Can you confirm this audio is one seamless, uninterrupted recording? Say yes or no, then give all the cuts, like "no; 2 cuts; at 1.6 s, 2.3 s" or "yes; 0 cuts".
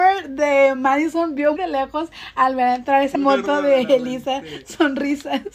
no; 2 cuts; at 1.6 s, 3.1 s